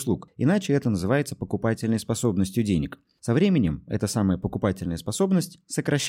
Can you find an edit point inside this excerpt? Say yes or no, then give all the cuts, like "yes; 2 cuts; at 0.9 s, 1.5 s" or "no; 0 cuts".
no; 0 cuts